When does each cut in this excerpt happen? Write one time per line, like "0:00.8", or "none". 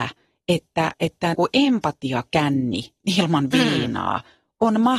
0:01.3